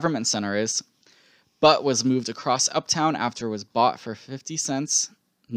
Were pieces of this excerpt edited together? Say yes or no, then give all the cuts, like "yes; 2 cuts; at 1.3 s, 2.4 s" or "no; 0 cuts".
no; 0 cuts